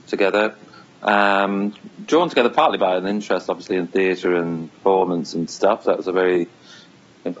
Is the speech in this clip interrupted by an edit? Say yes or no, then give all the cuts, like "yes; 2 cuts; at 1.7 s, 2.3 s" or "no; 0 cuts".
no; 0 cuts